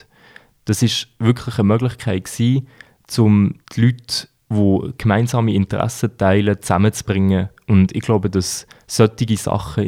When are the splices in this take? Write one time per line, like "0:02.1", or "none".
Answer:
0:03.6
0:04.4